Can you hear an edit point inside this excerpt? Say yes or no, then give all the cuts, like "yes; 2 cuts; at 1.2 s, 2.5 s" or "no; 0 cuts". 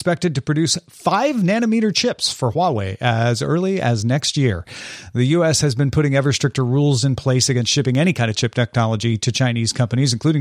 no; 0 cuts